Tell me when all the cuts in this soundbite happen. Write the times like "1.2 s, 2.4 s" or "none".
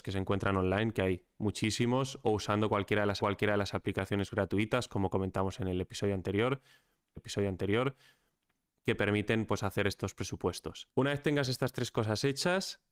3.2 s, 7.2 s, 10.9 s